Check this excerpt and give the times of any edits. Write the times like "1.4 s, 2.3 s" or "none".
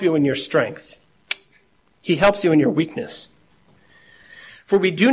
none